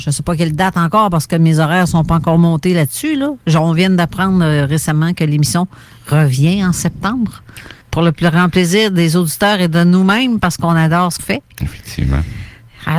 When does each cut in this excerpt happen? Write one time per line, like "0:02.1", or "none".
0:07.8
0:11.2